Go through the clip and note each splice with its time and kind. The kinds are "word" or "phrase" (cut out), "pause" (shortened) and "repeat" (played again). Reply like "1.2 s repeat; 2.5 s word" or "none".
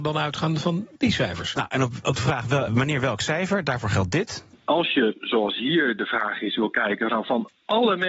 2.0 s word; 2.7 s word